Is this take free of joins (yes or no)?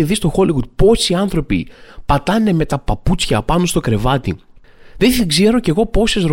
yes